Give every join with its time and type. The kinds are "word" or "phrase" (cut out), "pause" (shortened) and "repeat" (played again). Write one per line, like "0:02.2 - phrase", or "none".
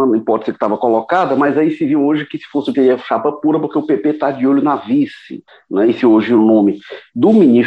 0:02.7 - word
0:05.5 - pause
0:06.0 - word